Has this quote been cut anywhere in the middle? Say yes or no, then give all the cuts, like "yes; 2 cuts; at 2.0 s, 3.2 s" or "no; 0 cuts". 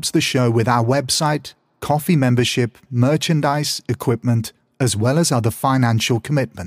no; 0 cuts